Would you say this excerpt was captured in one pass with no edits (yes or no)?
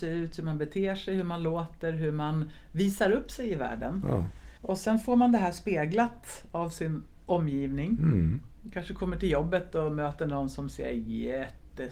no